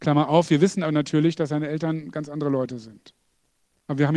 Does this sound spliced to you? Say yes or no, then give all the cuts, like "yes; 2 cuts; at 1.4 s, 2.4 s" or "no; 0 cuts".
no; 0 cuts